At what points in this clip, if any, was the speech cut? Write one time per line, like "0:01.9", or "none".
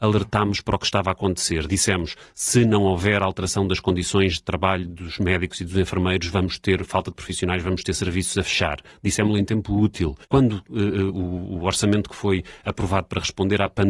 0:10.2

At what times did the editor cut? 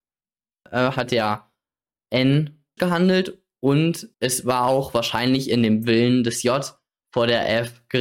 0:02.8
0:04.1

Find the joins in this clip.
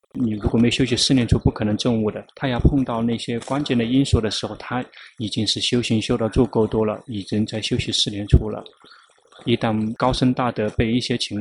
0:02.3

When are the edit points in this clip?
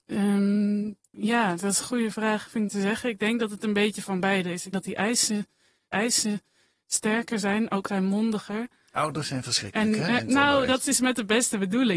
0:01.1
0:02.7
0:04.7
0:05.9
0:07.9

